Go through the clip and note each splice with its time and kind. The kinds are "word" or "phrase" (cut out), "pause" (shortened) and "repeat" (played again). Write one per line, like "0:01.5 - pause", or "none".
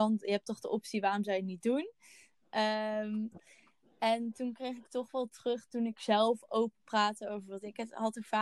none

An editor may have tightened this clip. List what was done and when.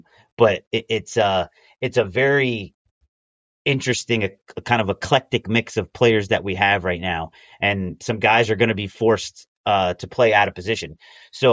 none

